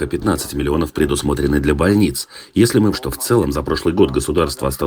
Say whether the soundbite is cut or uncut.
cut